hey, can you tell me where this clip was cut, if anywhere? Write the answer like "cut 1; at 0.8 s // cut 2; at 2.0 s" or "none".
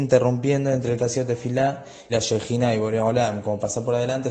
cut 1; at 1.0 s // cut 2; at 2.1 s

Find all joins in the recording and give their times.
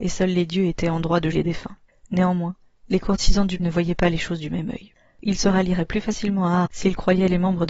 cut 1; at 1.3 s // cut 2; at 3.6 s // cut 3; at 6.7 s

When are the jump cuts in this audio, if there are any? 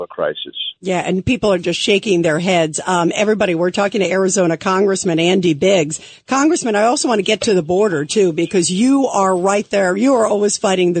none

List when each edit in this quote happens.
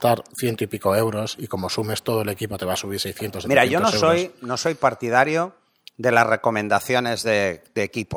none

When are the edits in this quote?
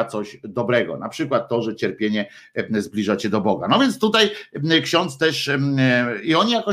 none

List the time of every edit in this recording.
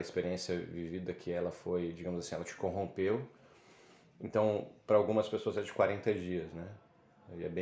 none

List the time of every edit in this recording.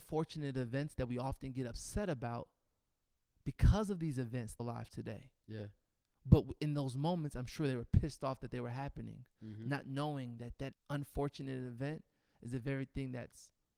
cut 1; at 4.6 s // cut 2; at 10.7 s

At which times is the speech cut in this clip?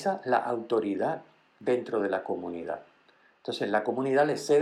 none

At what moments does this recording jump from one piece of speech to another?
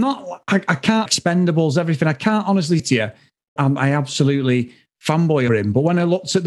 cut 1; at 1.1 s // cut 2; at 2.8 s // cut 3; at 3.6 s // cut 4; at 5.5 s

